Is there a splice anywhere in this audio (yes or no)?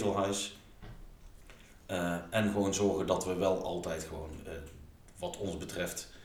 no